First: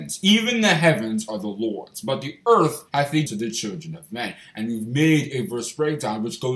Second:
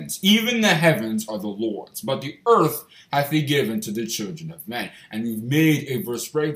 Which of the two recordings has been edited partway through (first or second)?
first